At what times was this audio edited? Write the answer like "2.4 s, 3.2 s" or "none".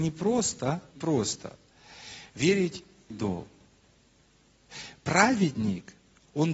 0.9 s, 3.1 s